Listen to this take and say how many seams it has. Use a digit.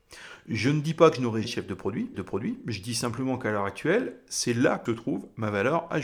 3